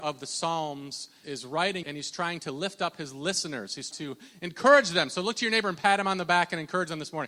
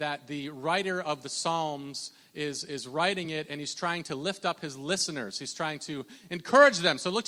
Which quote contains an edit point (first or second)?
first